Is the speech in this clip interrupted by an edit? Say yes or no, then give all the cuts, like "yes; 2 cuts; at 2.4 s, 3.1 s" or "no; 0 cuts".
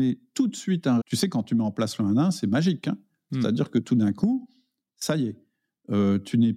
yes; 1 cut; at 1.0 s